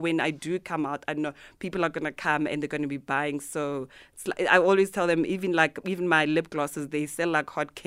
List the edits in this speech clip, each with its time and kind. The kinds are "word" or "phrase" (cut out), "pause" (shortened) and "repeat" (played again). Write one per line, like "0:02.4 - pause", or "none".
none

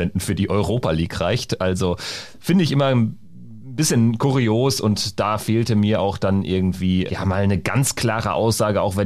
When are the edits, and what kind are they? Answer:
0:07.1 - word

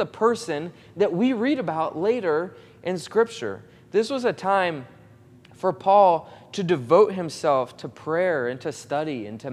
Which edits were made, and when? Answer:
none

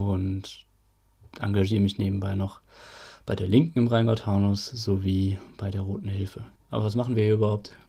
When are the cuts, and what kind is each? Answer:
0:06.6 - pause

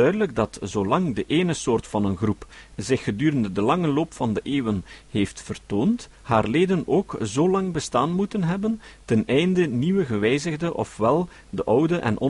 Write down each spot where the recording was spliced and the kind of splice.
0:06.1 - pause

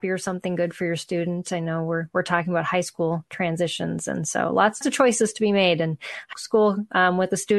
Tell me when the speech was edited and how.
0:04.8 - word
0:06.3 - word

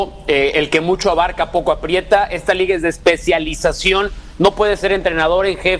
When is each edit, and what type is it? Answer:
none

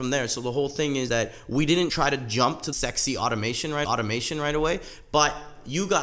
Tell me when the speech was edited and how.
0:01.1 - word
0:01.9 - word
0:02.7 - word
0:03.8 - repeat

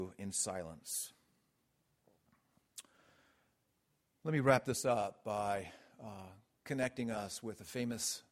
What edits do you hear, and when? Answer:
none

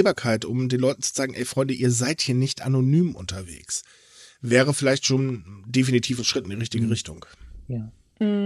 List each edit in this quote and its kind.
none

